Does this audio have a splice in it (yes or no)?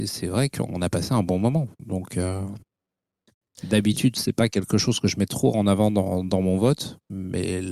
no